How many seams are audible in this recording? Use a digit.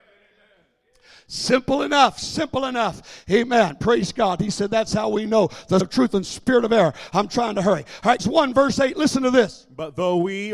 2